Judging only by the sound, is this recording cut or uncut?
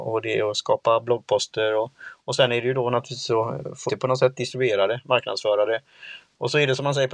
cut